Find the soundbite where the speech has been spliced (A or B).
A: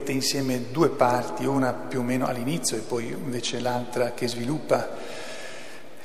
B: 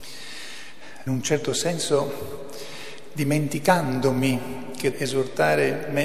B